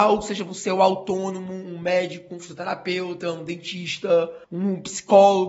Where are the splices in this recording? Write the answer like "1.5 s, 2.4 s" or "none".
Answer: 4.4 s

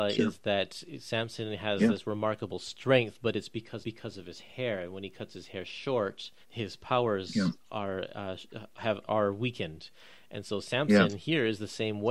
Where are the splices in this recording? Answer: 3.8 s, 6.4 s, 9.1 s

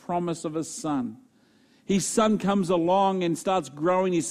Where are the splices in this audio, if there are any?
none

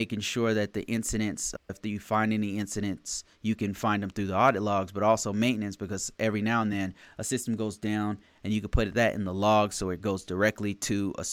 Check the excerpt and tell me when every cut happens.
none

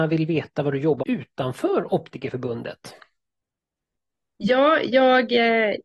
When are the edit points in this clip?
1.0 s

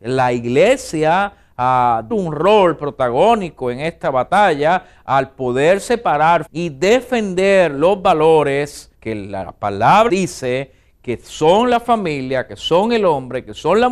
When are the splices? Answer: 2.1 s, 6.5 s, 8.9 s, 10.1 s

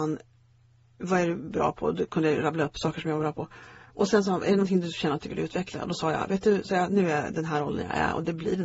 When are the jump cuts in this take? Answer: none

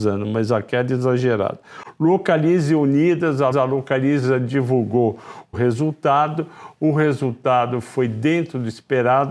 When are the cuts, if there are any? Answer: 3.5 s, 5.5 s

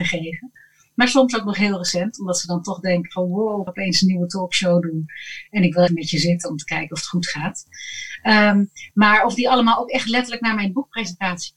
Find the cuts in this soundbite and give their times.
3.7 s, 5.9 s

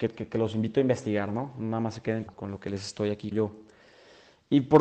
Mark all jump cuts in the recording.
2.3 s, 3.3 s

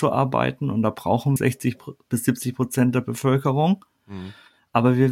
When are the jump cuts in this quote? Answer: 1.4 s

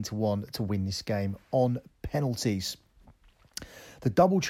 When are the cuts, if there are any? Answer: none

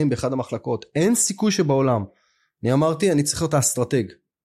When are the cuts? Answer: none

